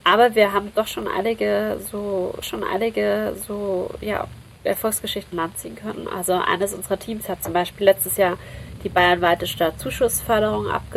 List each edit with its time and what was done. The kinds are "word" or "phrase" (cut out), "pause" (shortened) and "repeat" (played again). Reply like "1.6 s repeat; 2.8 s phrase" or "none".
2.4 s repeat; 5.3 s word

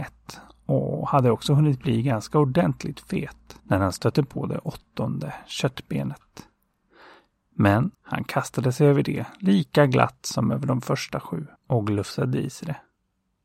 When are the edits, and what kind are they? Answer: 3.6 s pause; 7.9 s pause; 11.6 s pause

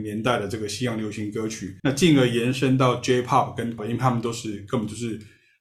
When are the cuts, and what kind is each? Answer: 1.8 s pause; 3.8 s word

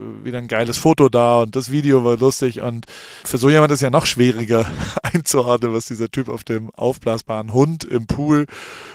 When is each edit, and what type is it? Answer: 3.2 s word

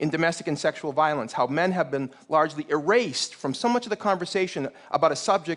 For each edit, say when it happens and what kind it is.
none

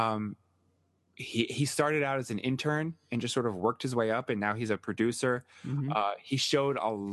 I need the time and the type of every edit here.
none

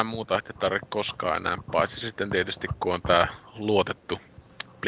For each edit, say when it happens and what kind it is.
1.6 s word

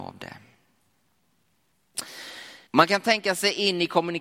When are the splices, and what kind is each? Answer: 2.7 s pause

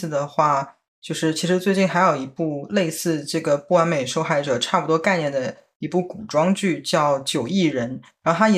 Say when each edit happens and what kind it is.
none

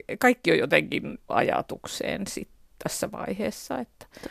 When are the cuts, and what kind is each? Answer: 1.3 s phrase

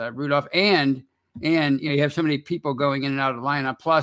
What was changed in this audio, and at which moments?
none

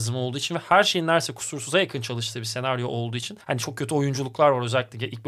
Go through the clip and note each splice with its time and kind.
3.4 s pause

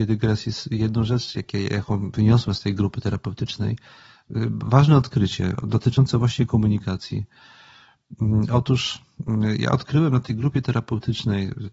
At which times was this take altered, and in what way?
none

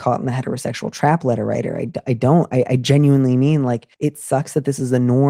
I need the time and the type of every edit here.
3.9 s pause

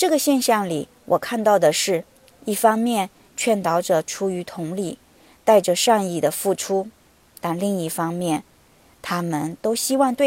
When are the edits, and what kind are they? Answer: none

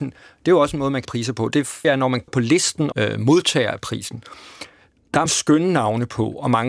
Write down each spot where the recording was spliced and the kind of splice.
1.0 s word; 1.8 s word; 2.3 s word; 2.9 s word; 5.3 s word

